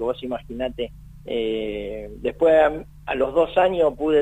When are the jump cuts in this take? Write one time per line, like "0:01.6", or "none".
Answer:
0:01.2